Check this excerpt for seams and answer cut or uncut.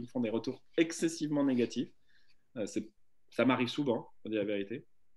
uncut